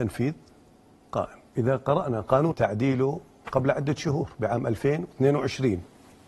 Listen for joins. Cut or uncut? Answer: cut